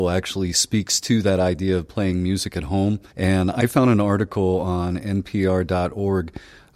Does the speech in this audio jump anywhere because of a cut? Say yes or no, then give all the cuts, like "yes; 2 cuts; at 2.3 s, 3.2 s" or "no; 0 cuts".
yes; 1 cut; at 3.1 s